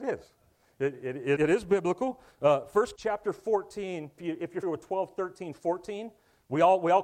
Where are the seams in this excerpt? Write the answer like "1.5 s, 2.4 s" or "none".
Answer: 1.4 s, 3.0 s, 4.2 s, 4.6 s